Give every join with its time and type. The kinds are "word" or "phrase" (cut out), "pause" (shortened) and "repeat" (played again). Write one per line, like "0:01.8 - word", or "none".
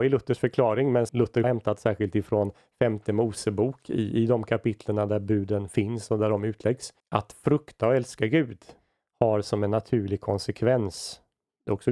0:01.1 - word
0:01.4 - phrase
0:07.0 - pause